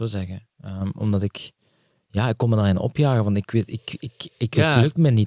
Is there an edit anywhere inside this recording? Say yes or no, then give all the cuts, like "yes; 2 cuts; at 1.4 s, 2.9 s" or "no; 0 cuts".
no; 0 cuts